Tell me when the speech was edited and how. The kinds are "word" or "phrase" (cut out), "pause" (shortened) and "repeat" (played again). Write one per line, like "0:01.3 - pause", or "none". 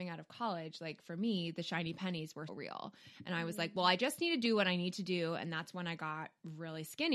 0:02.5 - word

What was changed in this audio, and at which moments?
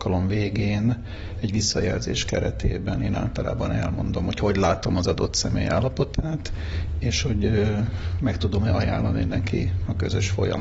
none

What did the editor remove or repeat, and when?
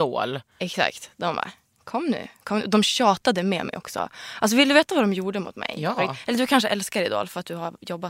none

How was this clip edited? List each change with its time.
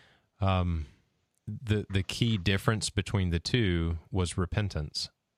none

